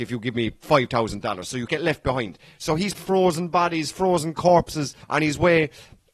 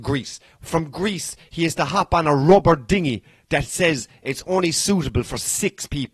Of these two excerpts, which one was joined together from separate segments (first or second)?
first